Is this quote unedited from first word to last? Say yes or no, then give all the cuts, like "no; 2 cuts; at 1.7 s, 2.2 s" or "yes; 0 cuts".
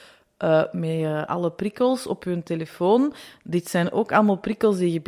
yes; 0 cuts